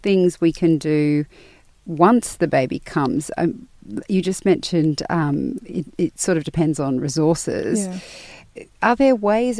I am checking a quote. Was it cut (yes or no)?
no